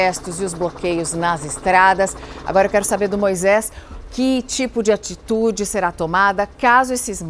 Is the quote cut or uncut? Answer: uncut